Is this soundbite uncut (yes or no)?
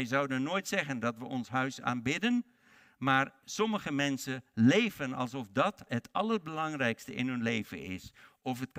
yes